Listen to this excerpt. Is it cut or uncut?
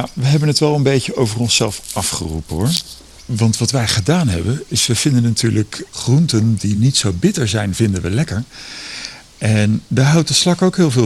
uncut